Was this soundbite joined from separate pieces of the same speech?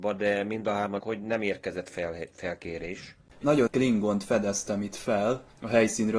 yes; 2 cuts; at 1.0 s, 3.7 s

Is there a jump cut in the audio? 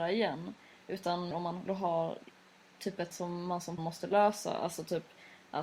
yes; 4 cuts; at 1.3 s, 1.7 s, 3.1 s, 3.8 s

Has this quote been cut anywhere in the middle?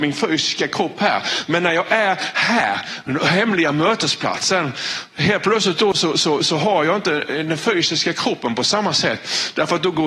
no; 0 cuts

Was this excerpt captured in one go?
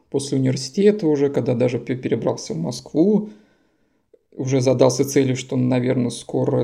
yes; 0 cuts

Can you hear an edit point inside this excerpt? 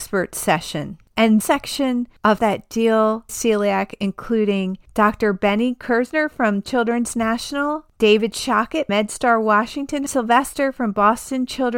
yes; 5 cuts; at 1.4 s, 2.4 s, 3.3 s, 8.9 s, 10.1 s

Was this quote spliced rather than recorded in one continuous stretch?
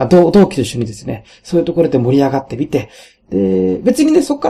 no; 0 cuts

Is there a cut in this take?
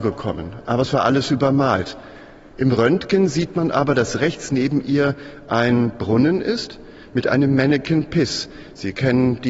no; 0 cuts

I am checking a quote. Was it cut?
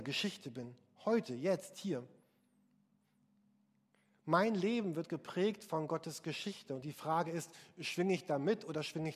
no; 0 cuts

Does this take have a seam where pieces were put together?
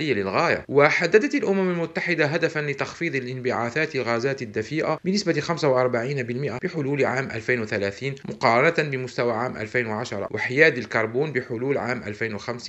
no; 0 cuts

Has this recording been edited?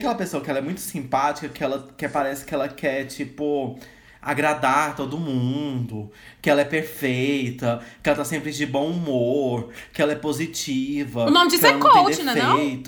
no; 0 cuts

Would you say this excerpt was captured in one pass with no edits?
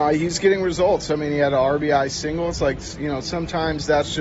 yes; 0 cuts

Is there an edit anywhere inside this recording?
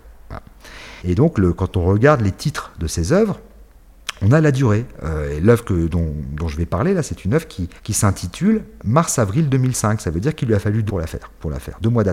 yes; 3 cuts; at 1.0 s, 7.8 s, 10.9 s

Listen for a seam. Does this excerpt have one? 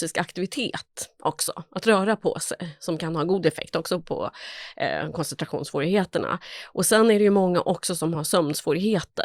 no; 0 cuts

